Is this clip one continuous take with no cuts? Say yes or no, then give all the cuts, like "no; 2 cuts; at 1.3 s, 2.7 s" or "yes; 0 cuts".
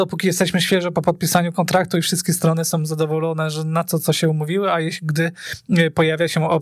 yes; 0 cuts